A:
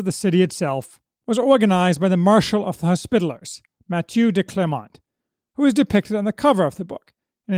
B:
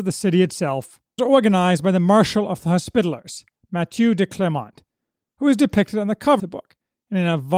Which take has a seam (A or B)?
B